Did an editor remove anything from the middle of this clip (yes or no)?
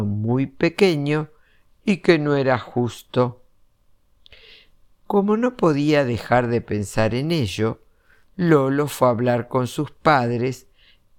no